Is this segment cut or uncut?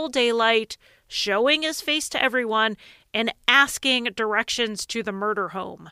uncut